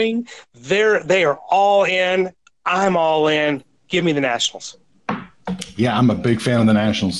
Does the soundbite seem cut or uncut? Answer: uncut